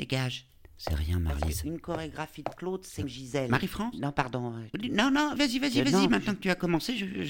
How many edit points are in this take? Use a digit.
2